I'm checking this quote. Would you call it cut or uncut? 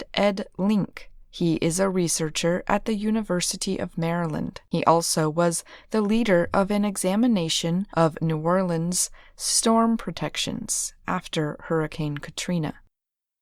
cut